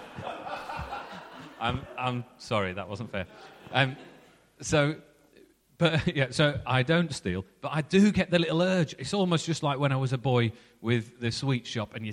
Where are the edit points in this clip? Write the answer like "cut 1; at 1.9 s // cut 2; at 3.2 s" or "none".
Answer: none